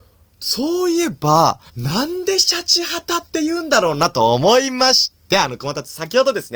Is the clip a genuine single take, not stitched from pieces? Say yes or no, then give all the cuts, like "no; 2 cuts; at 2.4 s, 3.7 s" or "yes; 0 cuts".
no; 1 cut; at 1.7 s